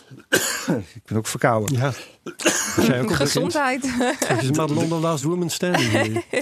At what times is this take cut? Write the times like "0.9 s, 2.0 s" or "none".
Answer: none